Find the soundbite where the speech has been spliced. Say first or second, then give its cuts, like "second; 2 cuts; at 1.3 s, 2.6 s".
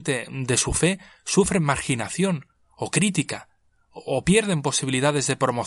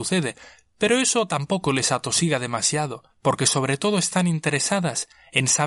second; 1 cut; at 3.1 s